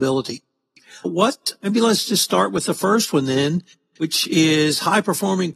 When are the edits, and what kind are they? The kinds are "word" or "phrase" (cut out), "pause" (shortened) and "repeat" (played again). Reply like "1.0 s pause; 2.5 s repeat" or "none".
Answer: none